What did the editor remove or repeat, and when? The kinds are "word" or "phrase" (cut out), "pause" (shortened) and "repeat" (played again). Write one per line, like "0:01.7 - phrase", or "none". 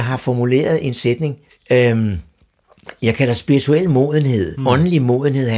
0:01.5 - pause